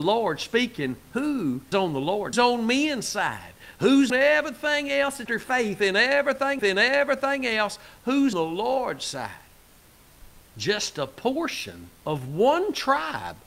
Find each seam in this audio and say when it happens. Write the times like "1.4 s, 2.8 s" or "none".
1.7 s, 2.3 s, 4.1 s, 5.3 s, 6.6 s, 8.3 s, 10.5 s, 12.0 s

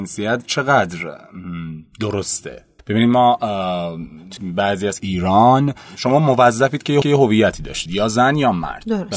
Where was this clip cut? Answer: 2.8 s, 4.4 s, 5.0 s, 7.0 s, 7.9 s

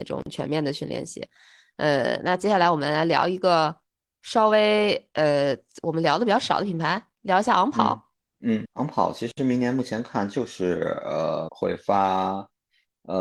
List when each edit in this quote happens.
8.6 s, 11.5 s

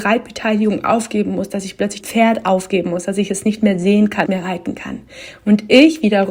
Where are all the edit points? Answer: 2.0 s, 4.3 s

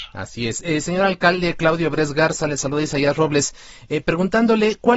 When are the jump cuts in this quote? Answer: none

